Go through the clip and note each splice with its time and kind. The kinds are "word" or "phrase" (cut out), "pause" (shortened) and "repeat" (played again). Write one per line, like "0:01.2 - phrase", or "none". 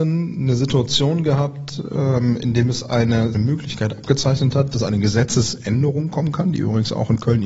0:03.3 - phrase